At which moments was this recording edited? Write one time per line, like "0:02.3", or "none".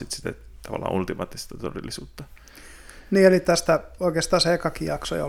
none